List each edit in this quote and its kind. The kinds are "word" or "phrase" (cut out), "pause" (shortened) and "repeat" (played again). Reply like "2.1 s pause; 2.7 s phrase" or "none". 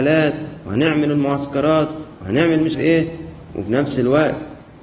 2.7 s word